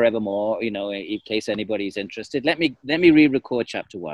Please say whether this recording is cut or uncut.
uncut